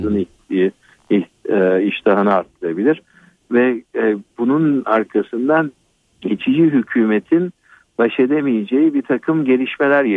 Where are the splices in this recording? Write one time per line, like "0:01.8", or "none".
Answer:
none